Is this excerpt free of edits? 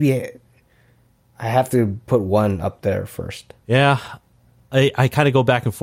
no; 1 cut; at 3.6 s

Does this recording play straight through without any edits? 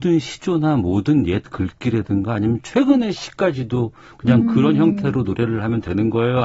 yes; 0 cuts

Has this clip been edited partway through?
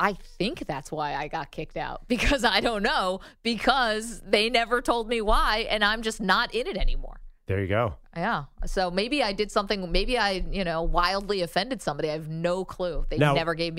yes; 1 cut; at 7.4 s

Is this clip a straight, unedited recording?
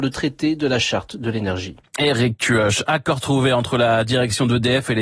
yes; 0 cuts

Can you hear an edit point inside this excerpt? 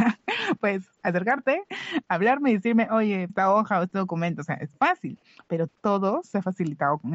yes; 3 cuts; at 3.3 s, 4.7 s, 5.7 s

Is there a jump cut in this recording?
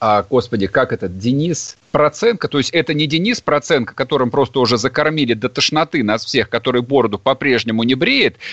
no; 0 cuts

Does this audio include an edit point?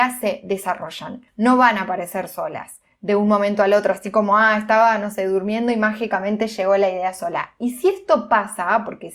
yes; 1 cut; at 1.3 s

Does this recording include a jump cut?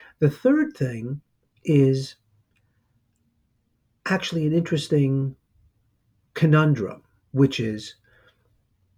no; 0 cuts

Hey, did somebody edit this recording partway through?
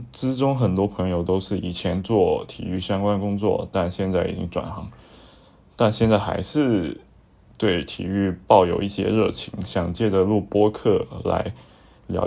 no; 0 cuts

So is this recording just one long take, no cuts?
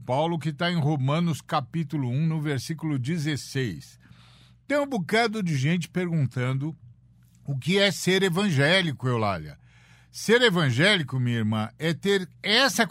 yes; 0 cuts

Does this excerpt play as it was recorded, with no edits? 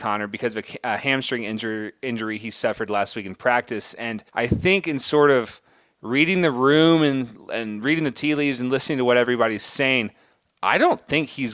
no; 1 cut; at 4.3 s

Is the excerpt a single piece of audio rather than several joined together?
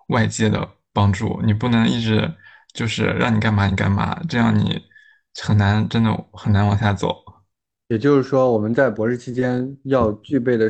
yes; 0 cuts

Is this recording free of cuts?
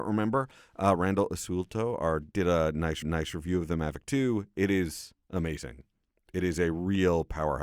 no; 3 cuts; at 2.3 s, 3.0 s, 5.2 s

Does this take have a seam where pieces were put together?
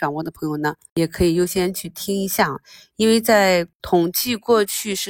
no; 0 cuts

